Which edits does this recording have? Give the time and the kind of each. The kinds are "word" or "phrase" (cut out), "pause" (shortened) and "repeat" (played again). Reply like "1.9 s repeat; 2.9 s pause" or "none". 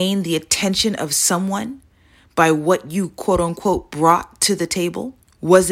none